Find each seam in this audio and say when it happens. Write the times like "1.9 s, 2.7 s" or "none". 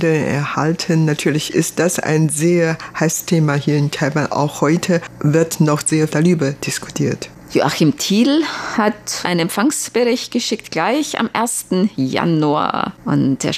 3.3 s, 6.1 s, 9.2 s